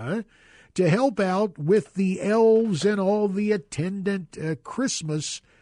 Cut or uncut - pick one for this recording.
uncut